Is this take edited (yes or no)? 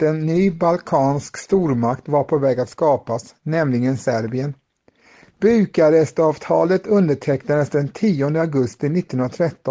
no